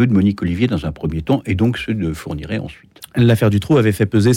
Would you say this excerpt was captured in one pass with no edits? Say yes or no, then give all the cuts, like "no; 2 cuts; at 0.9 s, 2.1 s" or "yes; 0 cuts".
yes; 0 cuts